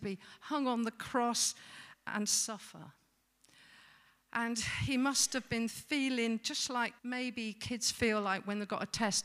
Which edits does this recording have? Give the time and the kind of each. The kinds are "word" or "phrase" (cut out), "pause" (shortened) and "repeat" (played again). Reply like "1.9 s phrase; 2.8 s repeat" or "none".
7.0 s pause

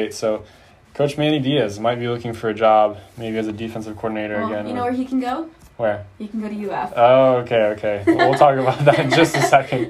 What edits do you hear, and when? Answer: none

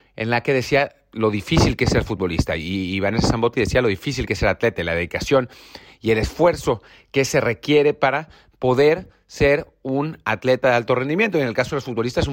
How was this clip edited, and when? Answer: none

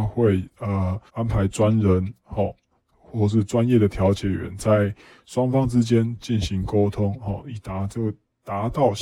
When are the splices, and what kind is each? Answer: 1.1 s pause

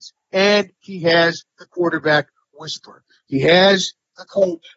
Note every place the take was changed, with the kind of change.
none

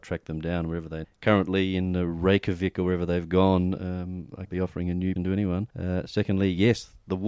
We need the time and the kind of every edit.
1.0 s word; 4.5 s word; 5.2 s word; 5.7 s pause

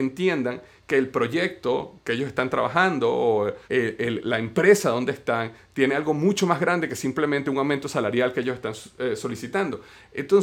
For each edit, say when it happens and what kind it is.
3.6 s pause

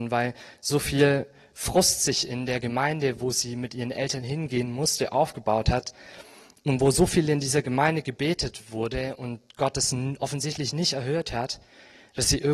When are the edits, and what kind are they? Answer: none

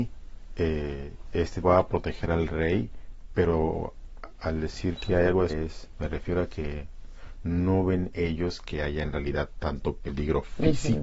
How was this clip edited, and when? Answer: 1.6 s word; 5.5 s word

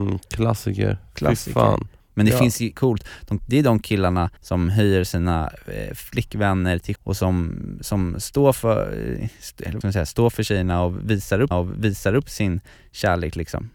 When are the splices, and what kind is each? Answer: 2.8 s word; 3.4 s phrase; 4.4 s pause; 7.0 s word; 9.8 s word; 11.5 s repeat

